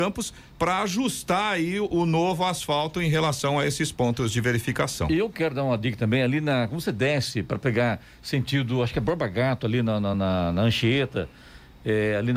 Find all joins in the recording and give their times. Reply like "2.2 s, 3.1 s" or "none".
none